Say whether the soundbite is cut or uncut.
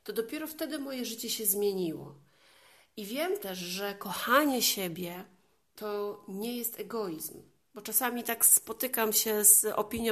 uncut